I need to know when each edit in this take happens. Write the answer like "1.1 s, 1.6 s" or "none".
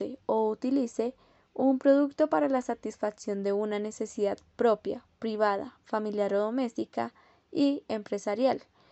none